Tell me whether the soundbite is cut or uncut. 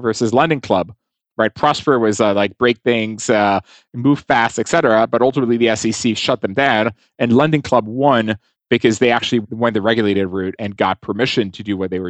uncut